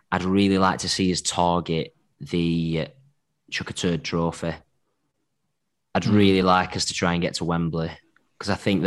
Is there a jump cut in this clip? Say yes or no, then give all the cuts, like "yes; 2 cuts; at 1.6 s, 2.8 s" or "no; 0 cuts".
no; 0 cuts